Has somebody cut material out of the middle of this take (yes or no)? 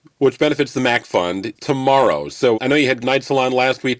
yes